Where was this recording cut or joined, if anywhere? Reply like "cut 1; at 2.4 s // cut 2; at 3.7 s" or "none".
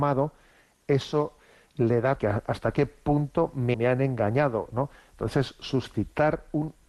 cut 1; at 2.2 s // cut 2; at 3.7 s